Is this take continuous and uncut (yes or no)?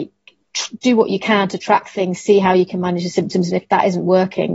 yes